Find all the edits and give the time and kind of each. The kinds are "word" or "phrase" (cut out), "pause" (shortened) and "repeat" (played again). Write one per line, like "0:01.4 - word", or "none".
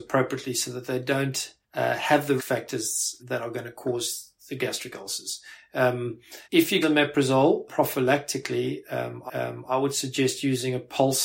0:01.6 - pause
0:02.4 - word
0:03.2 - word
0:04.4 - pause
0:06.4 - pause
0:06.8 - phrase
0:07.7 - word
0:09.3 - repeat